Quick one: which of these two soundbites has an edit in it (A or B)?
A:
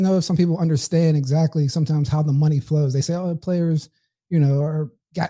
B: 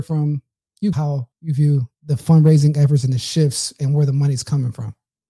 B